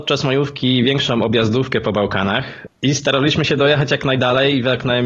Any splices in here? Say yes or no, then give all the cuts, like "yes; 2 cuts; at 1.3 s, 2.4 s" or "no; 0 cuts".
no; 0 cuts